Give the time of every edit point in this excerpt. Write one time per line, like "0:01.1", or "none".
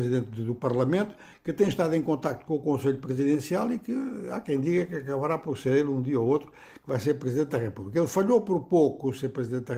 none

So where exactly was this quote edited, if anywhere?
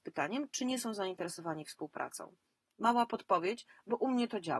none

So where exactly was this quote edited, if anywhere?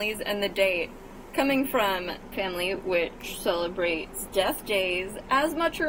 0:02.3

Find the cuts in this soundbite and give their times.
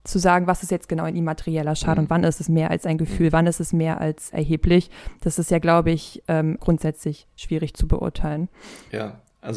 0:04.3
0:06.6

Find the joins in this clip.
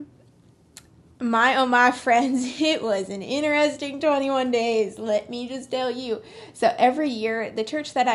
none

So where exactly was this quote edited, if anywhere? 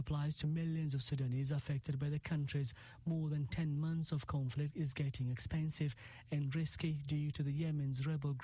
none

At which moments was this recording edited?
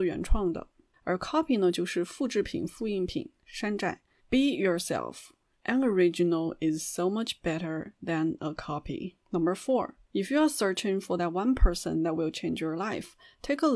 0:04.2
0:09.2
0:10.0

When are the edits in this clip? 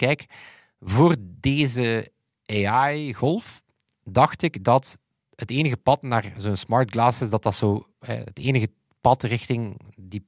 none

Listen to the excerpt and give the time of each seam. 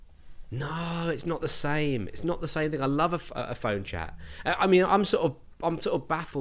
none

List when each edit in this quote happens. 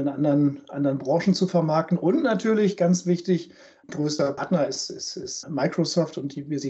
0:05.4

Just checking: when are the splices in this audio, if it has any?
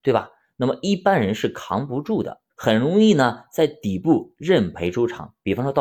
0:02.5

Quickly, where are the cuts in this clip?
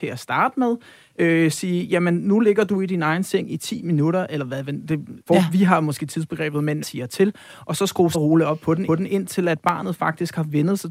0:05.2
0:06.8
0:08.1
0:08.9

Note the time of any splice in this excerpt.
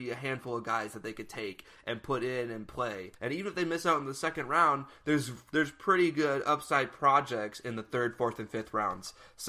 0:03.1

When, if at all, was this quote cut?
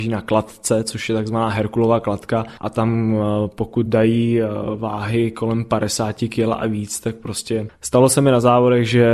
none

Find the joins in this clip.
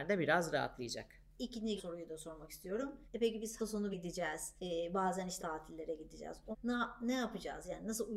0:01.8
0:03.0
0:03.6
0:03.9
0:04.6
0:05.4
0:06.5

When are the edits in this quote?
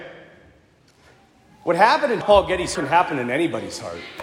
0:02.2
0:02.7

